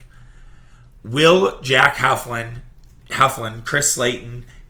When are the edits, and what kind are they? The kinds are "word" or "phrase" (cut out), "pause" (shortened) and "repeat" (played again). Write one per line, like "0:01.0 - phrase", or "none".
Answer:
none